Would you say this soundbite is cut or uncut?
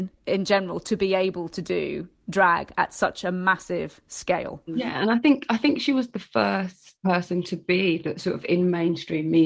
cut